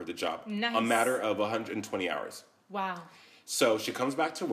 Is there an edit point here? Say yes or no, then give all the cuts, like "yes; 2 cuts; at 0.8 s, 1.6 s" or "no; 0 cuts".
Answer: no; 0 cuts